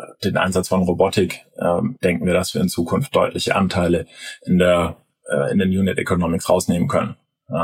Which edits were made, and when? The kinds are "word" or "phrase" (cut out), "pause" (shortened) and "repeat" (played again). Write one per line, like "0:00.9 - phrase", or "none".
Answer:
none

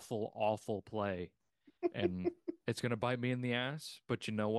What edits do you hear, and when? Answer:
0:02.6 - pause

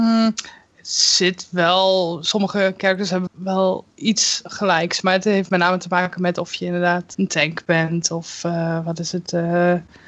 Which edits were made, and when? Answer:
0:03.3 - word
0:07.1 - word

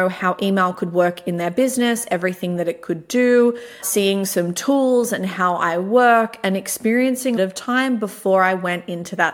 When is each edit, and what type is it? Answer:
0:03.8 - word
0:07.4 - phrase

